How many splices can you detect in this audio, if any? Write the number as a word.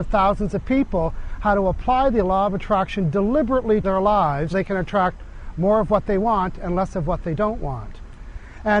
two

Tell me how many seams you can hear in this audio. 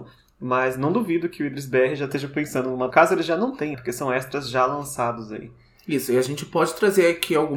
two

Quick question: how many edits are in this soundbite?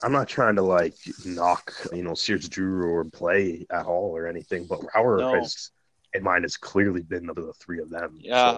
five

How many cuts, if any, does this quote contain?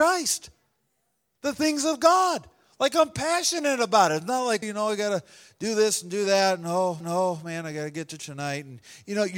three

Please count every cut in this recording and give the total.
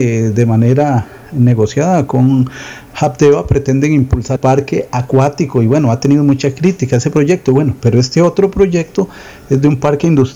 one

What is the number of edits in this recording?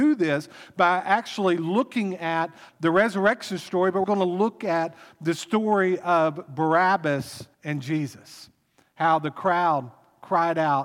three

